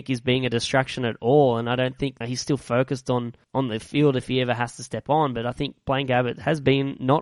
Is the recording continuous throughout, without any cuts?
no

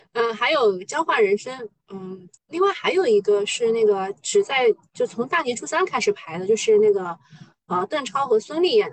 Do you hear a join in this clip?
yes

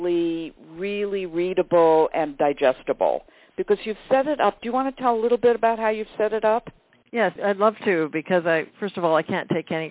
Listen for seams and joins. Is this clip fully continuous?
yes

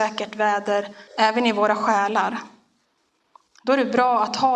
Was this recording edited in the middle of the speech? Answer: yes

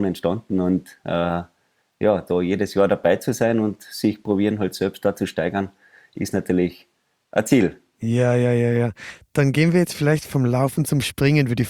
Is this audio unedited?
yes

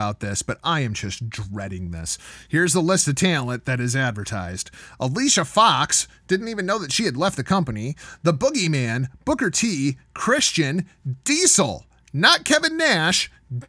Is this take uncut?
yes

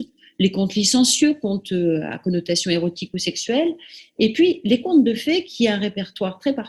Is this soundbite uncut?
yes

